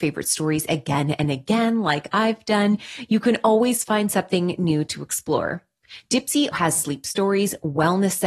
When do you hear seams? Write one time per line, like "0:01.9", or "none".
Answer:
0:06.5